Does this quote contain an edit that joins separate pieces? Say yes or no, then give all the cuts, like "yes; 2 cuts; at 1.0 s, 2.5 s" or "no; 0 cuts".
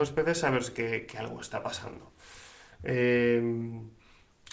no; 0 cuts